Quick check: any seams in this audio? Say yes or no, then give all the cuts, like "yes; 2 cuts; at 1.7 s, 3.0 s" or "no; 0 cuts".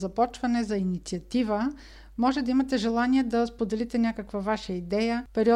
no; 0 cuts